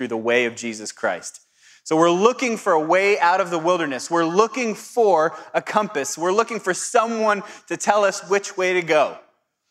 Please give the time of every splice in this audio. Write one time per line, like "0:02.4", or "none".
none